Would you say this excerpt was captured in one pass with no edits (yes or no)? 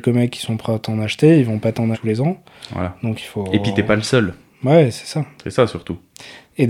no